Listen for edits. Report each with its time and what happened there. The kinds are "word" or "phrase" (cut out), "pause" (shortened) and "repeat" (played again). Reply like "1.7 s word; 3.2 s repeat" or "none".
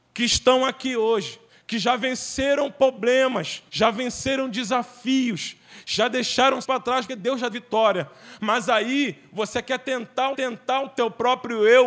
1.5 s pause; 3.7 s pause; 6.6 s word; 7.1 s word; 7.5 s word; 10.3 s repeat